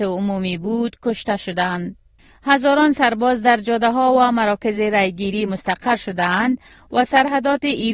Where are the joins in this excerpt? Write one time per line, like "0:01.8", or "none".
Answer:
none